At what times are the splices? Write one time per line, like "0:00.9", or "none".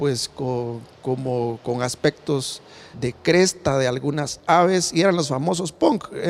0:02.9